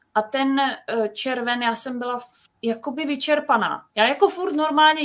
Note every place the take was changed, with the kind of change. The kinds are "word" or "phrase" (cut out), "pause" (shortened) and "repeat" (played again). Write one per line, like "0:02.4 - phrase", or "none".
0:02.5 - word

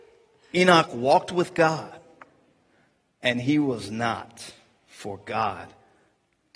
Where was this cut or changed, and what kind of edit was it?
none

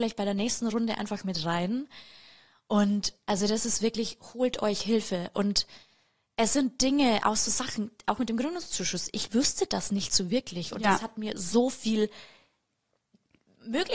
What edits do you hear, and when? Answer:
none

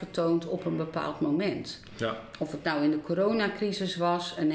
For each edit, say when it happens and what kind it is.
none

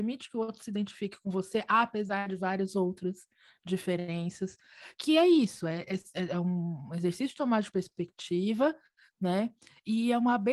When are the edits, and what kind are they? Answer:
none

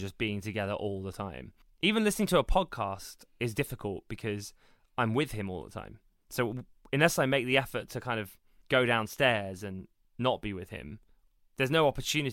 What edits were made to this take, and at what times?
none

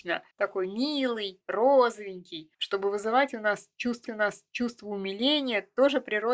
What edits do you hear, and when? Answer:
0:01.4 - word
0:04.1 - repeat

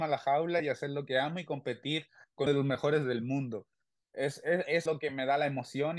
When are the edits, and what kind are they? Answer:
0:02.5 - word
0:04.9 - word

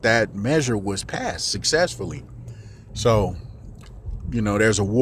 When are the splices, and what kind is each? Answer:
none

